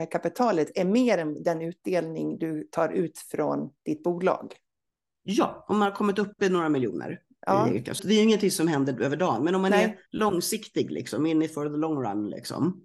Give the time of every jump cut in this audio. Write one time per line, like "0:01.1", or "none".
0:08.0
0:10.1